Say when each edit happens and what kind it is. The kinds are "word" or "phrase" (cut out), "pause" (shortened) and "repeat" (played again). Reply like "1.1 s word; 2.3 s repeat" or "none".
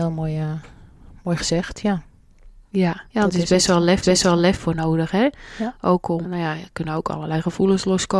3.1 s pause; 4.0 s repeat; 6.2 s word